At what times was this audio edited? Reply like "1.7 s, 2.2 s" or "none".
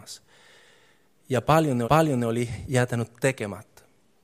1.8 s